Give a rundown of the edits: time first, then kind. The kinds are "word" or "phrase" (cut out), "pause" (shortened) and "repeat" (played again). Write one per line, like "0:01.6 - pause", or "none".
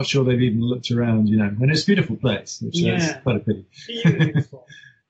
none

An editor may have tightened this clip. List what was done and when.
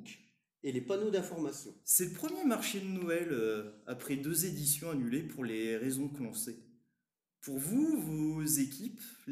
0:01.8 - pause

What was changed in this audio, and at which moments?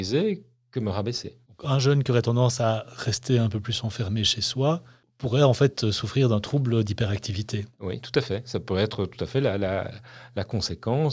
0:01.5 - pause

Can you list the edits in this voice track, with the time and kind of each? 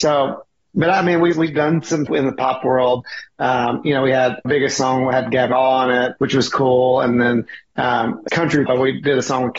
0:01.3 - word
0:02.1 - word
0:04.4 - word
0:05.5 - word
0:06.2 - word
0:08.3 - word
0:08.7 - word

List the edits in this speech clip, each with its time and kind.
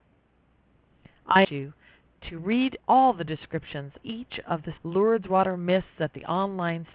0:01.4 - word
0:02.8 - pause
0:04.0 - word
0:04.8 - word

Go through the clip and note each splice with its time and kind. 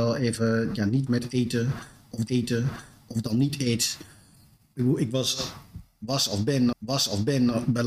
0:01.1 - word
0:02.3 - repeat
0:06.7 - repeat

